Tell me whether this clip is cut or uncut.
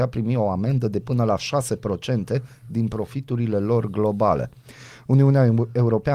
uncut